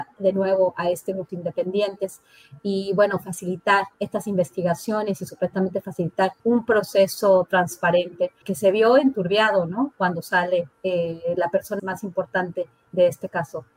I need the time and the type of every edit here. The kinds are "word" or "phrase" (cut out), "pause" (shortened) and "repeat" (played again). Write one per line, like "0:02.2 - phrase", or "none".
0:01.3 - phrase
0:03.9 - pause
0:06.4 - pause
0:08.4 - word
0:10.7 - pause
0:11.8 - word